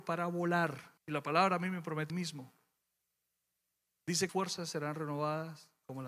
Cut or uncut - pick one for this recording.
cut